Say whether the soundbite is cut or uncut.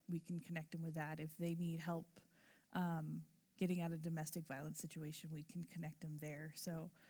uncut